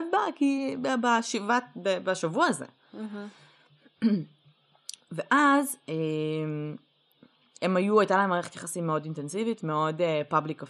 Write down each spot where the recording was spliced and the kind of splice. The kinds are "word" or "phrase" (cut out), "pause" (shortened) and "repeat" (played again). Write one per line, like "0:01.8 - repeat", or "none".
none